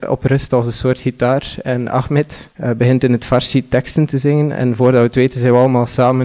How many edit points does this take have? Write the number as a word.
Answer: one